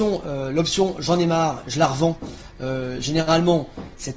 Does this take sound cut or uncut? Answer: uncut